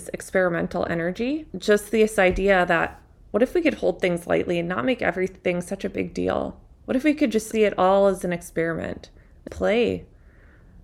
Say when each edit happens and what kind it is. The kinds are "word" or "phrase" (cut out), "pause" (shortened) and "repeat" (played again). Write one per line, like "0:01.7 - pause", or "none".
0:01.5 - pause
0:09.5 - word

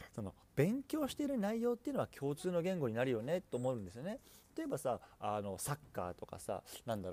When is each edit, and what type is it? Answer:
none

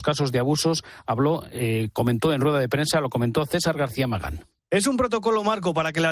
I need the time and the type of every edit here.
none

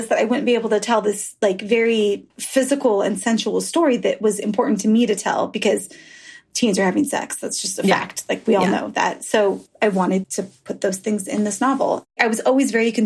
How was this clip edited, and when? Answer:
0:02.3 - pause
0:09.7 - word
0:10.2 - word
0:12.1 - pause

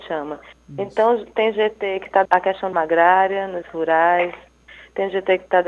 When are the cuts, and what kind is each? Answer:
0:02.2 - word
0:02.7 - word
0:03.6 - word

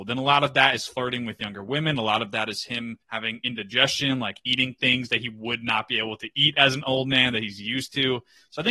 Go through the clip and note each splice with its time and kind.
0:03.0 - pause

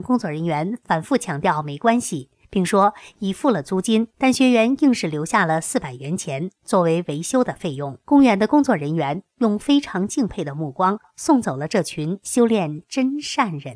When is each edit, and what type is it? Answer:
0:04.1 - pause
0:08.0 - pause

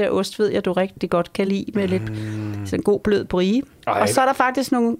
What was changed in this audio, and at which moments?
none

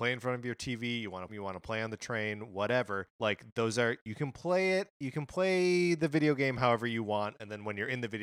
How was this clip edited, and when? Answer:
0:01.3 - phrase
0:03.1 - pause

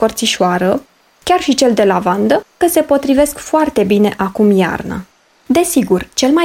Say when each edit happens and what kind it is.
0:02.6 - phrase

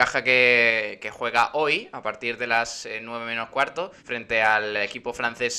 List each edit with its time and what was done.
0:04.0 - pause

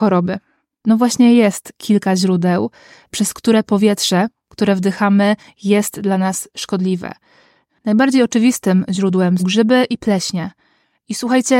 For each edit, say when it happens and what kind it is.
0:09.4 - word

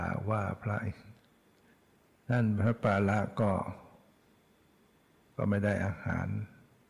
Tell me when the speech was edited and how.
none

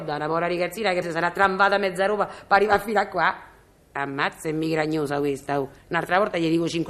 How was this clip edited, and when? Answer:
0:01.0 - word

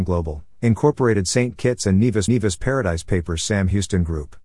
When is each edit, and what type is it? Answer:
0:02.3 - repeat

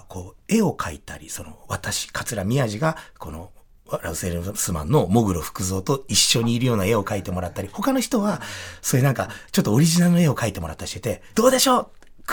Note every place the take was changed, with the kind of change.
0:11.3 - word

